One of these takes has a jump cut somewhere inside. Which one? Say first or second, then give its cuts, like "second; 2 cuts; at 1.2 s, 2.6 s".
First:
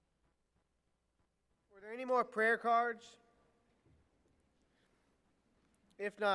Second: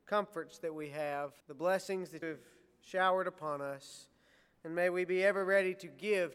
second; 2 cuts; at 1.4 s, 2.2 s